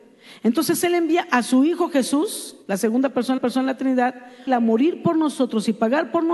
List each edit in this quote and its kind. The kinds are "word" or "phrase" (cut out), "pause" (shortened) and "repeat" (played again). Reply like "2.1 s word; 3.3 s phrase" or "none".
2.6 s pause; 3.4 s repeat; 4.5 s phrase